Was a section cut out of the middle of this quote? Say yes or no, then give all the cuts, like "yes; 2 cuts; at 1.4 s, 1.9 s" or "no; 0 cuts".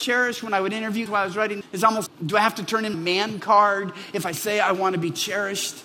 yes; 4 cuts; at 1.1 s, 1.6 s, 2.1 s, 2.9 s